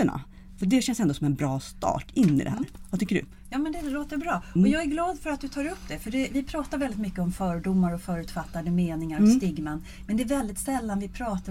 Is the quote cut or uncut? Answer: uncut